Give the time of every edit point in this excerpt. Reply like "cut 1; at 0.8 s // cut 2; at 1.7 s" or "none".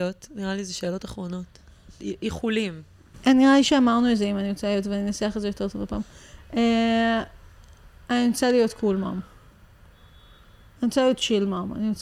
none